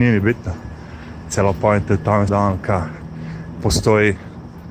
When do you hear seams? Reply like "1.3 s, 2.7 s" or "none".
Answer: 2.3 s